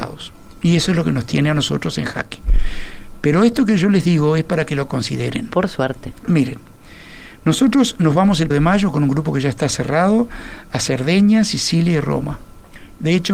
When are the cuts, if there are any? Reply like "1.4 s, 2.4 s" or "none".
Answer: 8.5 s